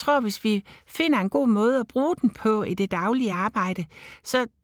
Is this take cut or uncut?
uncut